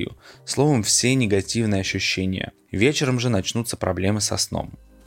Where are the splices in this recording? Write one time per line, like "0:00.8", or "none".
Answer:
none